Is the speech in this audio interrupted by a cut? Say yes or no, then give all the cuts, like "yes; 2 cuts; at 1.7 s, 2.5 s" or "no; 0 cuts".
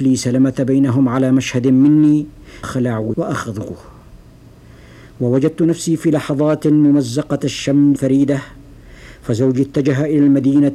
yes; 3 cuts; at 2.6 s, 3.1 s, 8.0 s